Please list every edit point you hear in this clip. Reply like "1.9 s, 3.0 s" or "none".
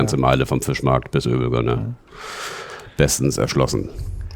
none